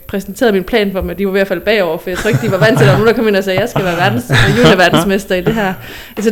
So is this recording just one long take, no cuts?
yes; 0 cuts

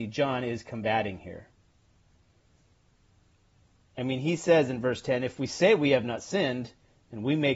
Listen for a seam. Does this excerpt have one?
no; 0 cuts

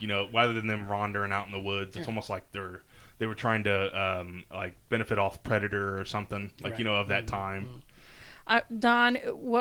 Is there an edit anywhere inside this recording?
no; 0 cuts

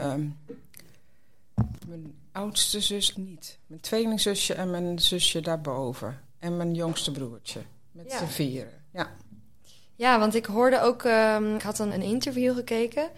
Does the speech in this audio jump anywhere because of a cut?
yes; 3 cuts; at 3.1 s, 11.6 s, 11.9 s

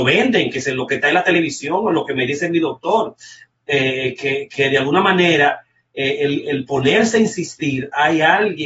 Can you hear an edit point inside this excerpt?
no; 0 cuts

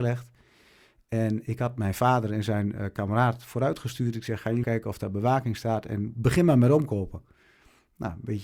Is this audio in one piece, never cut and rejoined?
no; 1 cut; at 4.6 s

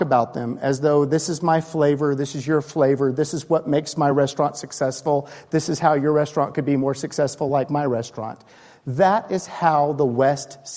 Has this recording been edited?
no; 0 cuts

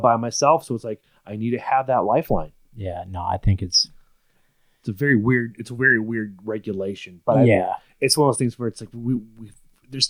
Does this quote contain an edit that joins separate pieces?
no; 0 cuts

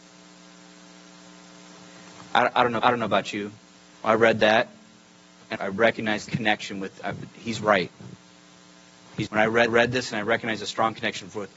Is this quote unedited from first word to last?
no; 6 cuts; at 2.8 s, 3.7 s, 5.6 s, 6.3 s, 9.3 s, 9.7 s

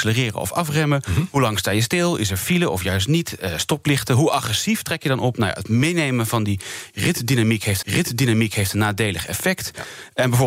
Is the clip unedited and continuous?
no; 1 cut; at 7.8 s

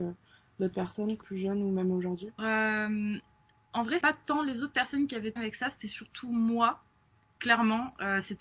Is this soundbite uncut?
no; 4 cuts; at 1.2 s, 2.4 s, 4.0 s, 5.4 s

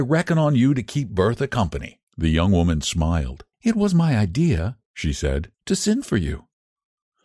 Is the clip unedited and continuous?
no; 4 cuts; at 2.1 s, 3.5 s, 4.8 s, 5.5 s

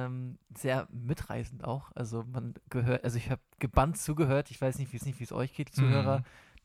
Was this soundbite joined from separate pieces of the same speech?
yes; 2 cuts; at 5.0 s, 5.7 s

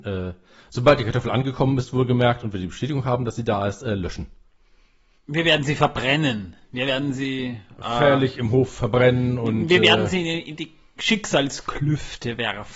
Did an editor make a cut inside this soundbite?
no; 0 cuts

